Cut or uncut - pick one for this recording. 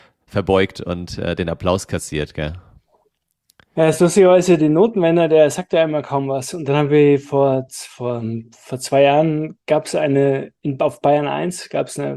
uncut